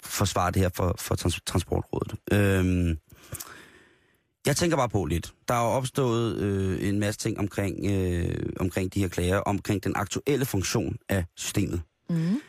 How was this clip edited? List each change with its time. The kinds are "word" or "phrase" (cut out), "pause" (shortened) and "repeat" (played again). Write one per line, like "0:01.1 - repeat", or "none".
0:02.2 - pause
0:05.4 - pause

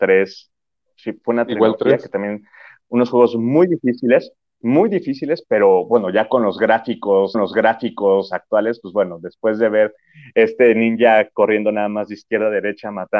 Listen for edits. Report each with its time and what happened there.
0:07.3 - repeat

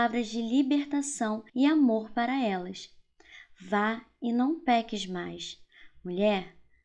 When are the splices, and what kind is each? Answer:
0:01.5 - pause

